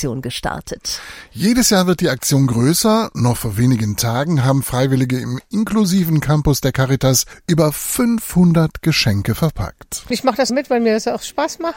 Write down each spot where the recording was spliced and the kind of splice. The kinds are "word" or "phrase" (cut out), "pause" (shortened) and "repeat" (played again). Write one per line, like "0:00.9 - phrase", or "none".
0:10.5 - word